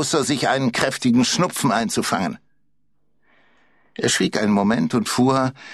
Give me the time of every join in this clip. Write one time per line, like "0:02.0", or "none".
none